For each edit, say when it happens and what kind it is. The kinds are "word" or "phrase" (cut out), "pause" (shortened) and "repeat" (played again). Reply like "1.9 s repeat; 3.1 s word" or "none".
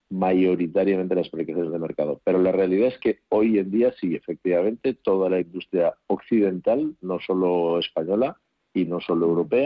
none